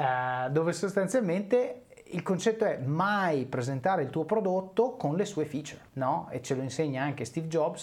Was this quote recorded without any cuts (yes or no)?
no